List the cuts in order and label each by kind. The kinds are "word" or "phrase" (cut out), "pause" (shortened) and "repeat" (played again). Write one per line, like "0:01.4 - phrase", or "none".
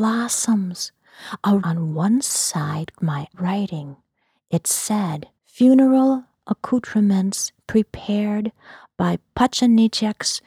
0:01.6 - word
0:02.9 - word
0:03.3 - phrase
0:05.4 - pause